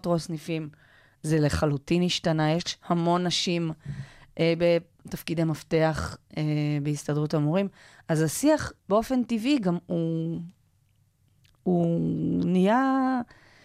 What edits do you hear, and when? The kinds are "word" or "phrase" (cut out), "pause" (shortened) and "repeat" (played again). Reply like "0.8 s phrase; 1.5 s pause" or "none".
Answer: 8.8 s pause